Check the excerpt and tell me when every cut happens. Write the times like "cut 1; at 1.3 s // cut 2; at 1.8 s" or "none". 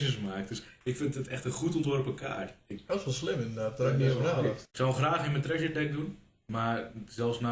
none